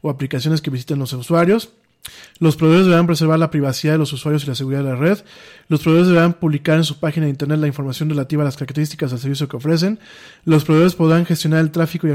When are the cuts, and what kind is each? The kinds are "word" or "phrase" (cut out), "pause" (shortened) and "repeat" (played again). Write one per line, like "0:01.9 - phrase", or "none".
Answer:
none

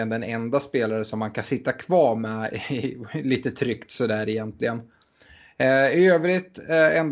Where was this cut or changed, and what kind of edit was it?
none

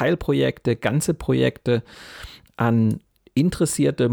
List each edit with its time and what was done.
none

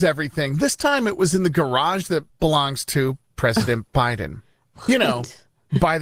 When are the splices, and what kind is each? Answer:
0:02.3 - pause

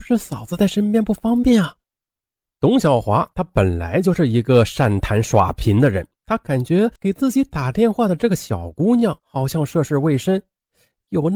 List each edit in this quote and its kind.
0:01.8 - pause
0:06.2 - pause
0:07.0 - pause

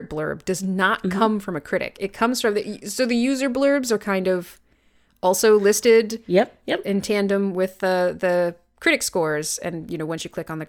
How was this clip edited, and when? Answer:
none

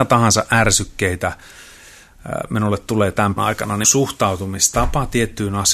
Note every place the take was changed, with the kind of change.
0:03.4 - word
0:03.8 - word

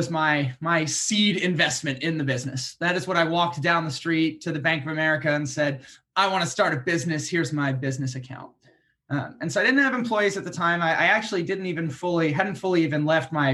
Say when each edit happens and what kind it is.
none

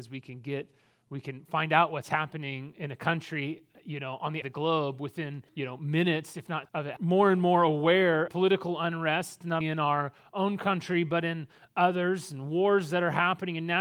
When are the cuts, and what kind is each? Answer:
0:04.4 - phrase
0:05.5 - pause
0:06.6 - word
0:07.0 - phrase
0:08.3 - phrase
0:09.6 - word

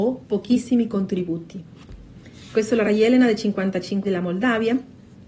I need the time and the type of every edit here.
0:02.8 - word
0:04.0 - word

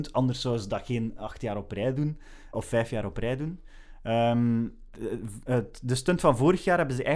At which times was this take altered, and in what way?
0:02.5 - word
0:04.9 - word

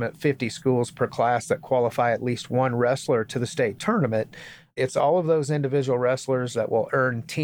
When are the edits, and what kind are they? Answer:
none

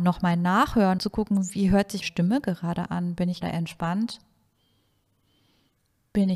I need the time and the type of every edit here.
0:01.0 - word
0:02.0 - word
0:03.4 - word

